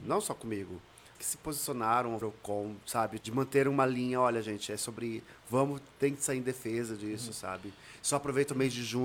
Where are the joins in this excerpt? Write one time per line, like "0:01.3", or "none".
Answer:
0:01.2
0:02.2
0:03.2